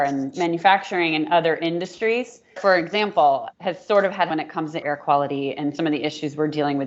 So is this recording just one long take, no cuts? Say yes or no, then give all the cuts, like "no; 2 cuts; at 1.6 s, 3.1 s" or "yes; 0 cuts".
no; 3 cuts; at 2.6 s, 4.3 s, 4.8 s